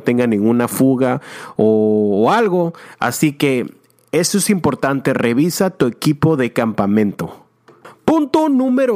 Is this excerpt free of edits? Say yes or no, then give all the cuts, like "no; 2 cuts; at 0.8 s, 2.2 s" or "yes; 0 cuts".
yes; 0 cuts